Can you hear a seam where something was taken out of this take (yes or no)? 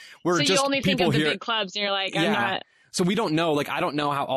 no